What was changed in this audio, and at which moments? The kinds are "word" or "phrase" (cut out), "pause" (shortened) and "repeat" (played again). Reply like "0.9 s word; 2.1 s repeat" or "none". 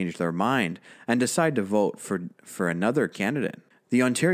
none